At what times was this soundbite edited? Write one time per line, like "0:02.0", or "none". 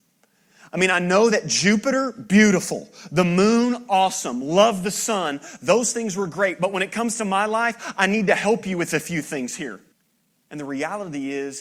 0:09.9